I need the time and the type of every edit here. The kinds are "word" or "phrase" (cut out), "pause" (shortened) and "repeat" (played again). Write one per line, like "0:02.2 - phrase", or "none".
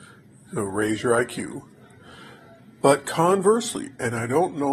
none